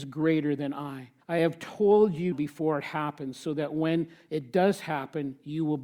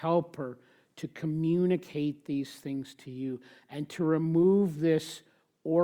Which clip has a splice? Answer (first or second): first